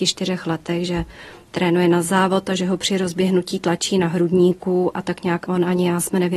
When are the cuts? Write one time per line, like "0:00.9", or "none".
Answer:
0:05.5